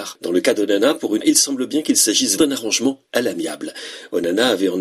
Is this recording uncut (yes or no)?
no